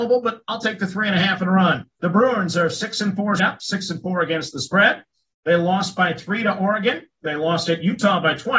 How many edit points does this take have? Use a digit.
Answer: 2